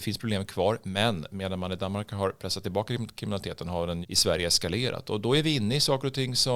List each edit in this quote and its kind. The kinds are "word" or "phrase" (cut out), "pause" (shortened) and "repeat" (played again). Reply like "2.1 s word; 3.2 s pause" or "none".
4.0 s word